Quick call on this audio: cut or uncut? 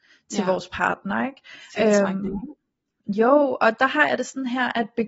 uncut